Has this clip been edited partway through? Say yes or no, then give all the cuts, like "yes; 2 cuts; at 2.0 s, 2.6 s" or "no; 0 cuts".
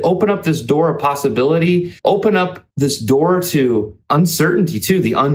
yes; 3 cuts; at 2.0 s, 2.7 s, 4.0 s